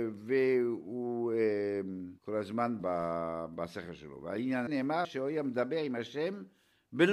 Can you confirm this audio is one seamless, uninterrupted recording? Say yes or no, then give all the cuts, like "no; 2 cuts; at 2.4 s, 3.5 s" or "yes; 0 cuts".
no; 4 cuts; at 2.2 s, 2.8 s, 4.7 s, 5.0 s